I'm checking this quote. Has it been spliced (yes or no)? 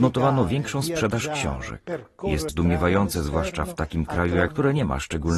yes